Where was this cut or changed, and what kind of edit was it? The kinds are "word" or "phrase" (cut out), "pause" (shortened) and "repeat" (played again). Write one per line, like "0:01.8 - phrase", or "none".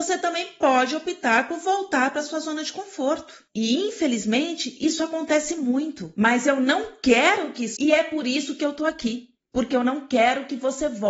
0:07.8 - phrase
0:09.4 - pause